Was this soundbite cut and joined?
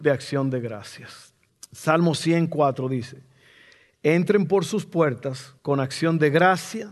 yes; 2 cuts; at 1.5 s, 5.6 s

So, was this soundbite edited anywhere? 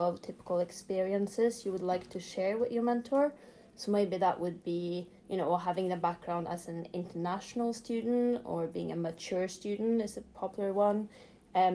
yes; 1 cut; at 5.2 s

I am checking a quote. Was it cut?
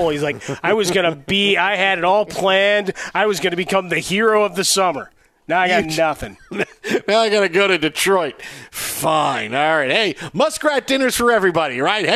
no; 0 cuts

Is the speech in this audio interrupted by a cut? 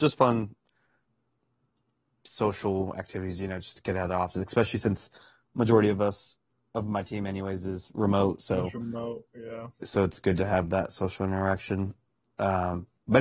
no; 0 cuts

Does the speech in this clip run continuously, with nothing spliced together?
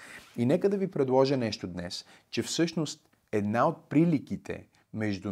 yes; 0 cuts

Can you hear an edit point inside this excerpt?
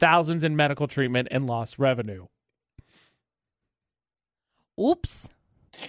no; 0 cuts

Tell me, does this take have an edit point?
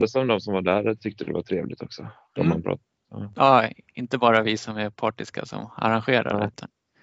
no; 0 cuts

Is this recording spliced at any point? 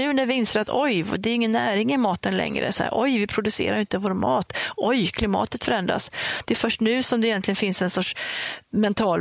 no; 0 cuts

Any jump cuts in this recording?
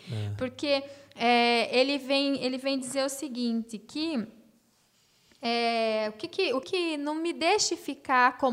yes; 1 cut; at 6.6 s

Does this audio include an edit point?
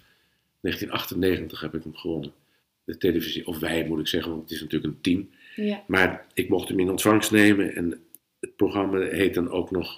yes; 2 cuts; at 2.6 s, 8.2 s

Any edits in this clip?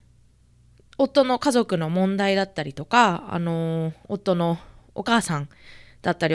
yes; 1 cut; at 4.0 s

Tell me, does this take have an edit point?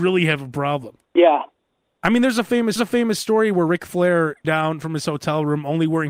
yes; 3 cuts; at 1.0 s, 2.8 s, 4.4 s

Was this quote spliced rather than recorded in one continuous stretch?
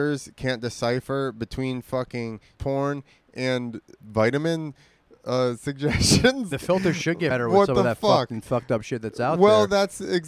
yes; 4 cuts; at 2.6 s, 4.0 s, 6.5 s, 7.3 s

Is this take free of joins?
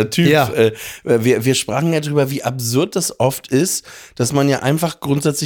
yes; 0 cuts

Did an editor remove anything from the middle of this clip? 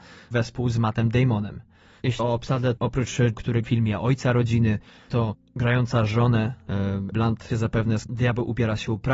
yes; 6 cuts; at 2.2 s, 3.3 s, 3.6 s, 7.1 s, 7.5 s, 8.1 s

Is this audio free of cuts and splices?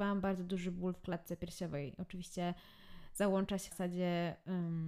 no; 1 cut; at 3.7 s

